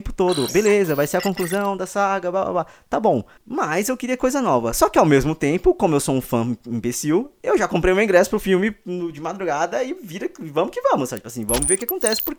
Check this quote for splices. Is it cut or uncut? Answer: uncut